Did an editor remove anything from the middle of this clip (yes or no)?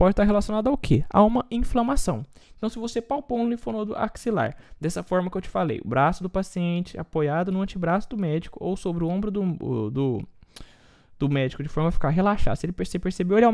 no